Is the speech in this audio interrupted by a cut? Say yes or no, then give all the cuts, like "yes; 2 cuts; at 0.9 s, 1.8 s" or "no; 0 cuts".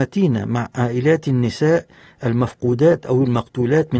no; 0 cuts